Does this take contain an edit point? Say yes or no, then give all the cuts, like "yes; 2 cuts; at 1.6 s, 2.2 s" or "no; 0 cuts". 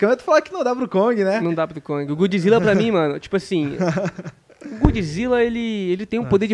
no; 0 cuts